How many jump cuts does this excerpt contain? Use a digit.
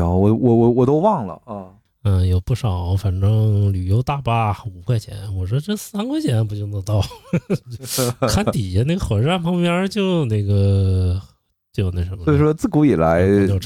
0